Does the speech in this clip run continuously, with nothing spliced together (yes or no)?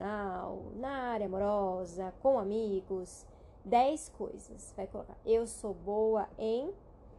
yes